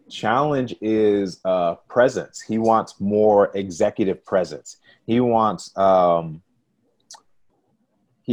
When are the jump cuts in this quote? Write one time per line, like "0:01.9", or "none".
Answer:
none